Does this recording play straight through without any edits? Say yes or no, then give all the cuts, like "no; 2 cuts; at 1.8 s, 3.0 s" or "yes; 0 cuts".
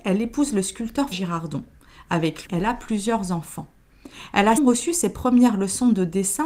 no; 3 cuts; at 1.1 s, 2.5 s, 4.6 s